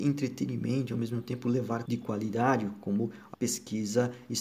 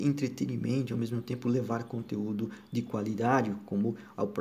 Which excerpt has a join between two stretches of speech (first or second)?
first